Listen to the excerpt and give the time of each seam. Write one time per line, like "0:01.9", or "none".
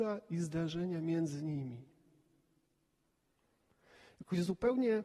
none